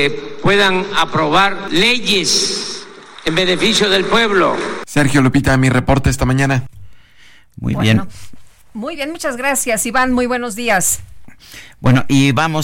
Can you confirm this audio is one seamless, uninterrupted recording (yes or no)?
yes